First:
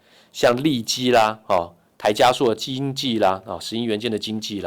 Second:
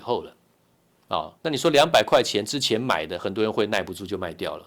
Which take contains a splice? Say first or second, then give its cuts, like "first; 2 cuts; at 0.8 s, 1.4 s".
second; 1 cut; at 1.4 s